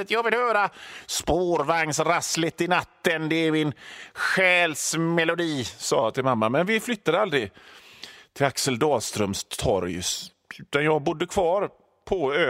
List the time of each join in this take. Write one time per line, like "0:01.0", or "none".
none

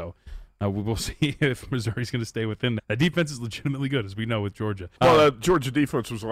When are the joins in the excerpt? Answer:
0:02.8
0:05.0

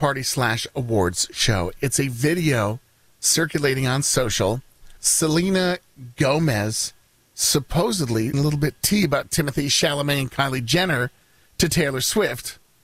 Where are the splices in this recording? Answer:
0:05.0
0:08.3

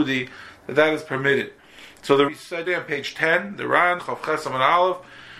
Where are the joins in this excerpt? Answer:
0:02.3
0:02.7
0:04.0

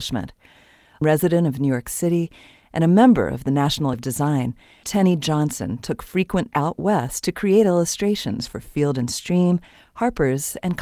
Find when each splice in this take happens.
0:01.0
0:03.9
0:04.8
0:06.5

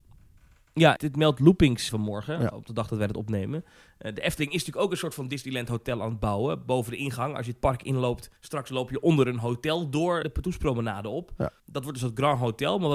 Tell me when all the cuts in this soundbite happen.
0:01.0
0:01.9
0:08.4
0:10.2
0:11.6

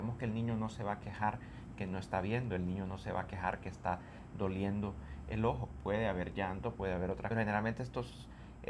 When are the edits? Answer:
0:07.3

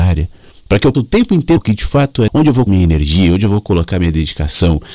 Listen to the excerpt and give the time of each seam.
0:00.9
0:01.6
0:02.3
0:02.7

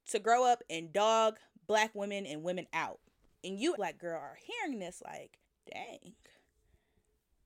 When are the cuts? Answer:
0:03.8
0:05.4

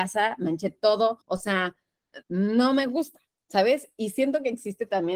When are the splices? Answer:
0:01.2
0:02.2

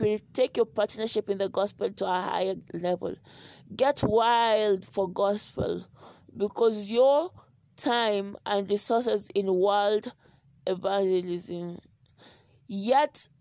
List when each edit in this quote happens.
none

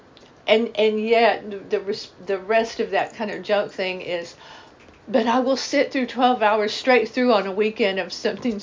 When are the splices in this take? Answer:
none

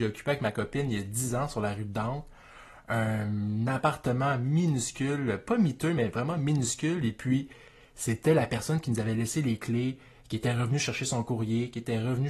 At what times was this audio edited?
none

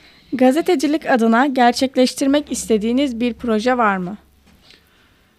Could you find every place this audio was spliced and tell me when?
none

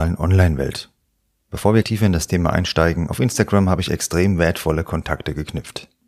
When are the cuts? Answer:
0:01.8

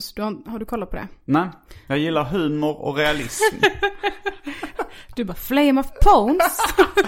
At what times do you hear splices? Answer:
none

